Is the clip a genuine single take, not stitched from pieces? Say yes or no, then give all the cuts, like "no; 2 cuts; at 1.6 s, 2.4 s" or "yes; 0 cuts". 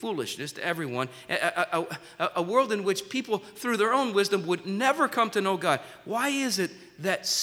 yes; 0 cuts